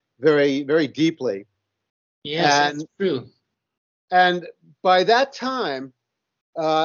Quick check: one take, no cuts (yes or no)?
yes